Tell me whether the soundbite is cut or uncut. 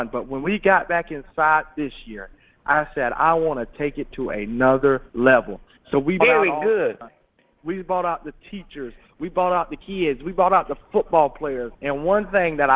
cut